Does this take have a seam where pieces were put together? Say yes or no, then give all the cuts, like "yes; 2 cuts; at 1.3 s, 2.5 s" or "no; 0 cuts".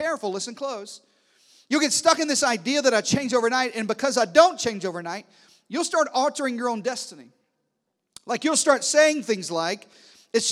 no; 0 cuts